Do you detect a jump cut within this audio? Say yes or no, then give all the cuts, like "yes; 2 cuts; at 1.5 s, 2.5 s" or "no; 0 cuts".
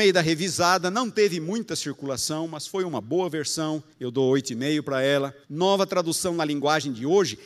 yes; 2 cuts; at 3.9 s, 5.4 s